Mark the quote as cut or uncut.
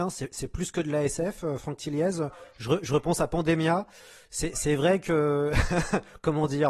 uncut